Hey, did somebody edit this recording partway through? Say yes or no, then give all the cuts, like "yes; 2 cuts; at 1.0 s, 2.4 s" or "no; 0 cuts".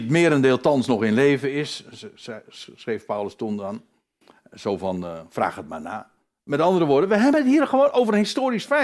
no; 0 cuts